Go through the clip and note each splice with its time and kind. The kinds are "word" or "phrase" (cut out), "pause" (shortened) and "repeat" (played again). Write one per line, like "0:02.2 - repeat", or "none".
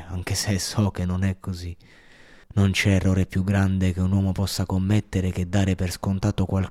0:02.4 - pause